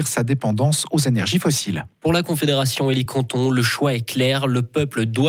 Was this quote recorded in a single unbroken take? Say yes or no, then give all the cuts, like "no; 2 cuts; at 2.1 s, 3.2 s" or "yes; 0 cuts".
yes; 0 cuts